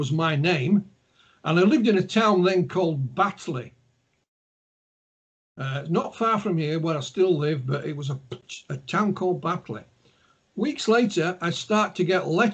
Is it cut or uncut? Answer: uncut